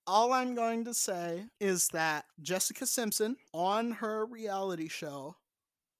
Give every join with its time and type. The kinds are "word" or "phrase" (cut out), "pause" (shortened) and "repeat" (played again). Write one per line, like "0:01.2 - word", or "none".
0:01.5 - pause
0:02.3 - pause
0:03.5 - pause